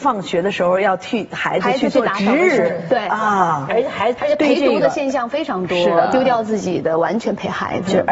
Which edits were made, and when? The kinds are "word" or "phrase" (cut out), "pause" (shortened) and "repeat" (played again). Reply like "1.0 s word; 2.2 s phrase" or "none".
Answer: 3.7 s word; 4.2 s word